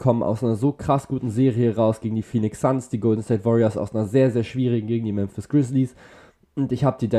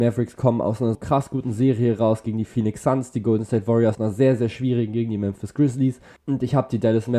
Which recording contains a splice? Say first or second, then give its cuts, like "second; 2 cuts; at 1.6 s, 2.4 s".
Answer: second; 3 cuts; at 0.9 s, 3.9 s, 6.2 s